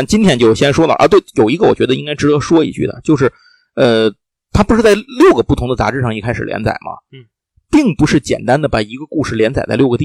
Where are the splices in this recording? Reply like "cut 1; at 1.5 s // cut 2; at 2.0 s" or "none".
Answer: none